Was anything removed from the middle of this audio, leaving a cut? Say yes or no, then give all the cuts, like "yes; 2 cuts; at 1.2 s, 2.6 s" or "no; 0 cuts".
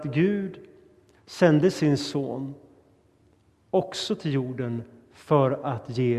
no; 0 cuts